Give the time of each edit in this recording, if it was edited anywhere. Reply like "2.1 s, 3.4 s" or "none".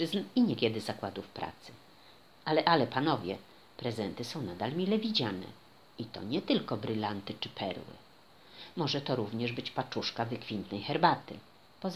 none